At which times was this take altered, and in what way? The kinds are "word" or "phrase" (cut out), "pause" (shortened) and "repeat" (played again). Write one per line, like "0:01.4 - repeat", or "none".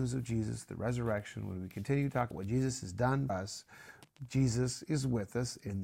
0:02.3 - word
0:03.3 - word